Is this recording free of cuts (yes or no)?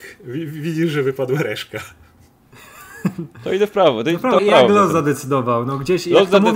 no